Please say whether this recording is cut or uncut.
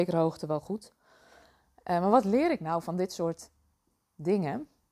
uncut